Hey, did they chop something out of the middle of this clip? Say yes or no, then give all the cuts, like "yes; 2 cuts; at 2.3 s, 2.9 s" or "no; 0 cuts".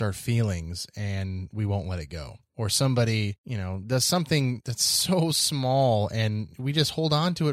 yes; 1 cut; at 2.5 s